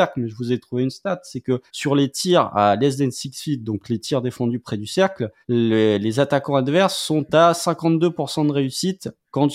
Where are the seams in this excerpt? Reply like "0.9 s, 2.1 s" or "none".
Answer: 1.7 s, 5.4 s